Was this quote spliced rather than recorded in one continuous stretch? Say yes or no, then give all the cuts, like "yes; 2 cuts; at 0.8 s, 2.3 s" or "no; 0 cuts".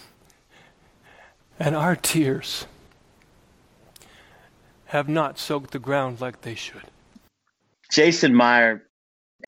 no; 0 cuts